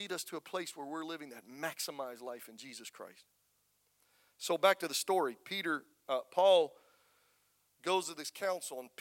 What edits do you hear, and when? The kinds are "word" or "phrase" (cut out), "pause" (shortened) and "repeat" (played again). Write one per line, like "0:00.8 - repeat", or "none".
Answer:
none